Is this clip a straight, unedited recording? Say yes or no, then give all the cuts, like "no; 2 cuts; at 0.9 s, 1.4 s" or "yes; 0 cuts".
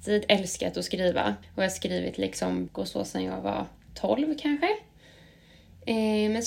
no; 2 cuts; at 1.4 s, 2.7 s